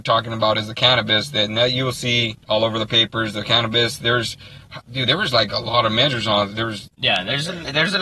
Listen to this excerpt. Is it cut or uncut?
cut